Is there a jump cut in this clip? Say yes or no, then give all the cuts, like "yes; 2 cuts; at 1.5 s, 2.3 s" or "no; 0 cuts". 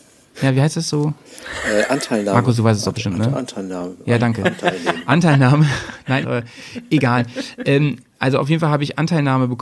yes; 1 cut; at 6.2 s